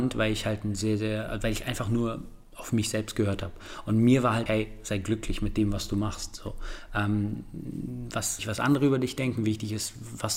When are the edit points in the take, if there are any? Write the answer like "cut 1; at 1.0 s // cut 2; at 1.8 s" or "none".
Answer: cut 1; at 4.5 s // cut 2; at 8.4 s